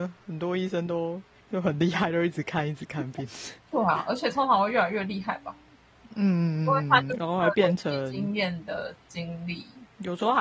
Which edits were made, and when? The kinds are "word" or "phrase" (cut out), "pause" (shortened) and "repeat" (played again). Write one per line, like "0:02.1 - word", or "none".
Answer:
none